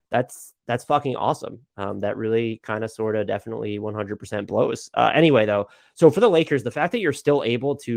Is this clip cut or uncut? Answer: uncut